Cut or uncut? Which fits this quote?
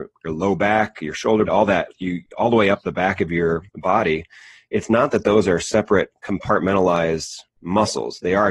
cut